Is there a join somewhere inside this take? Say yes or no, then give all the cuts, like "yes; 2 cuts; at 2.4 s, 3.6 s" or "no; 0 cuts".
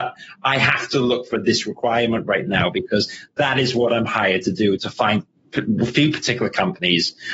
no; 0 cuts